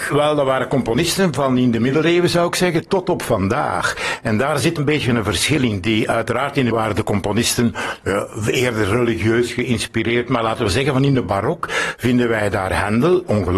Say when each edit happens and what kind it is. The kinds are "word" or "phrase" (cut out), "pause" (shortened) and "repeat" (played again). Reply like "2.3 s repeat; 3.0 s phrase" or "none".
4.8 s word; 6.7 s word